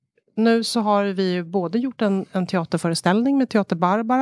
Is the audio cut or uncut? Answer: uncut